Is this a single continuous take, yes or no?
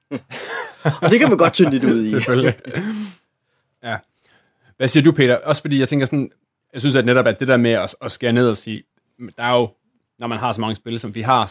yes